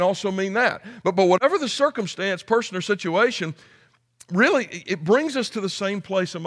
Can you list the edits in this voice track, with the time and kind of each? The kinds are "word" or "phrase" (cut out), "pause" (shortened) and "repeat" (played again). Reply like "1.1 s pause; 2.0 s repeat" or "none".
none